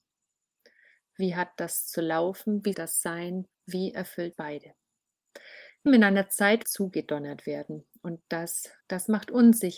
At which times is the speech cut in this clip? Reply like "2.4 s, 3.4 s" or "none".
2.7 s, 3.5 s, 4.3 s, 5.9 s, 6.6 s, 8.8 s